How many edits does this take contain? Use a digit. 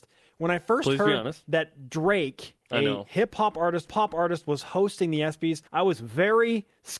3